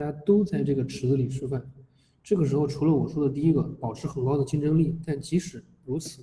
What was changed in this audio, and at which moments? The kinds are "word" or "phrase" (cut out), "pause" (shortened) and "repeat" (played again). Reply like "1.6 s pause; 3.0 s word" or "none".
none